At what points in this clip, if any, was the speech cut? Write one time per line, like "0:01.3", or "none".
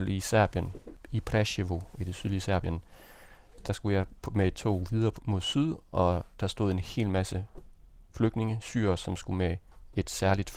none